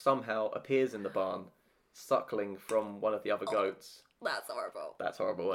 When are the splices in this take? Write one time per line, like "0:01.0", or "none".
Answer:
none